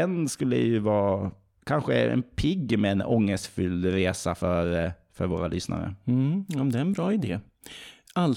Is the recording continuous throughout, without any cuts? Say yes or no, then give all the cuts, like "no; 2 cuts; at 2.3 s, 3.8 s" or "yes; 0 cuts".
yes; 0 cuts